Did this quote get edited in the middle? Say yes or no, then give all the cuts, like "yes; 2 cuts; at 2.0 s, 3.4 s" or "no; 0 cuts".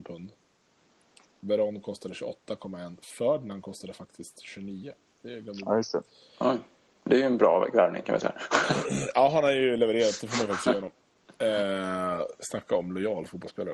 no; 0 cuts